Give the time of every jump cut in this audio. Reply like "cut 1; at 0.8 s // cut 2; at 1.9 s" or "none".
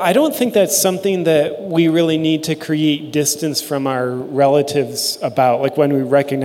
none